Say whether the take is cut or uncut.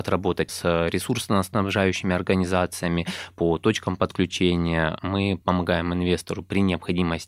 uncut